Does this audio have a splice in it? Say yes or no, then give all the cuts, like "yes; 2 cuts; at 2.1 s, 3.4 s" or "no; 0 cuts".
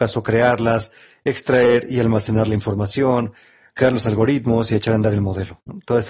no; 0 cuts